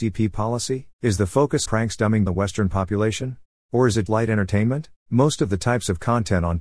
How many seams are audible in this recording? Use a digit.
6